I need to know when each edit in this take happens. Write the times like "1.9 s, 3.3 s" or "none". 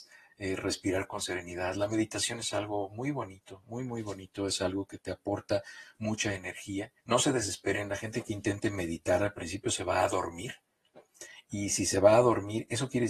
7.0 s